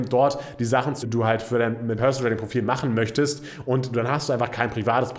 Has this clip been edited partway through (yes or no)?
yes